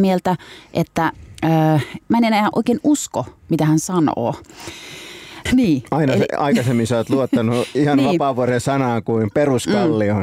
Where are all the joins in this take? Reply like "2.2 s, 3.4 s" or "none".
2.0 s, 5.5 s